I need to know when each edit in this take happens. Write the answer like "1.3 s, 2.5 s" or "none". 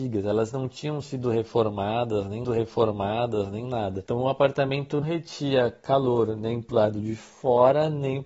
2.4 s, 5.0 s

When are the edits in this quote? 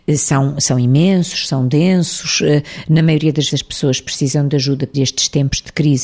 3.5 s, 4.9 s

